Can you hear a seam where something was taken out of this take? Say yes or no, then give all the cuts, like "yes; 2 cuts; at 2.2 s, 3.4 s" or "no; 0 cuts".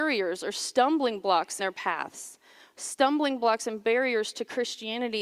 yes; 1 cut; at 1.6 s